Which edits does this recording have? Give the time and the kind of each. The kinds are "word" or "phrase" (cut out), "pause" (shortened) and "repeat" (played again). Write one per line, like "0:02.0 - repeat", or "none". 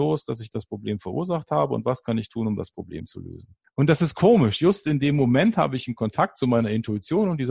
none